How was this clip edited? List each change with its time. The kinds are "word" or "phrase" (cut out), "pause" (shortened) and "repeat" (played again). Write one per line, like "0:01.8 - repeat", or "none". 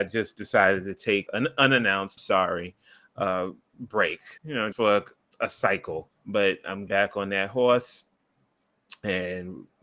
0:01.3 - word
0:02.2 - word
0:04.4 - pause
0:04.7 - word
0:05.3 - pause
0:06.2 - pause
0:06.9 - phrase